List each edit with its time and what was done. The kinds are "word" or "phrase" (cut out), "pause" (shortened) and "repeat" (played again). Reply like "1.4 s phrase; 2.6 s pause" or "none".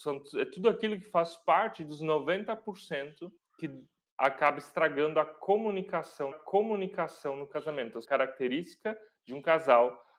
3.4 s pause; 6.3 s repeat; 8.0 s word